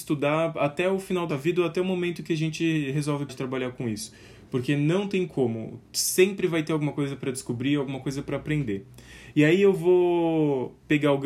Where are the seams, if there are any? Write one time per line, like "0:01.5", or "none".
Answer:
0:01.3
0:03.3
0:05.9